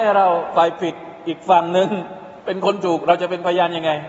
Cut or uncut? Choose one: cut